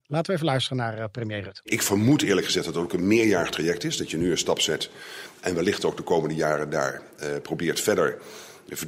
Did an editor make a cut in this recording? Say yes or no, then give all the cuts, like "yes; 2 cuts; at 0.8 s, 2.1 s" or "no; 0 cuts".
no; 0 cuts